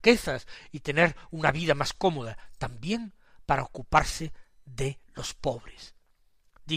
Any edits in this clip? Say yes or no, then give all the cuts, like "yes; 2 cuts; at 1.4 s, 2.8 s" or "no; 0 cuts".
no; 0 cuts